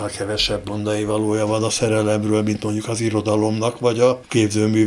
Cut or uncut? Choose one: uncut